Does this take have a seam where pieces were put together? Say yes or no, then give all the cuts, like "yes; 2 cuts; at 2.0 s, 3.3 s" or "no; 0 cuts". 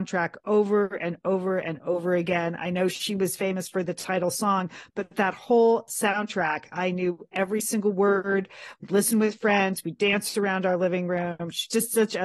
no; 0 cuts